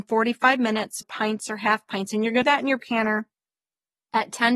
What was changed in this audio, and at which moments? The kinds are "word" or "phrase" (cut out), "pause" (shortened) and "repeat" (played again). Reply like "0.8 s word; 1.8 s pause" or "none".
1.0 s word; 2.4 s phrase; 2.8 s word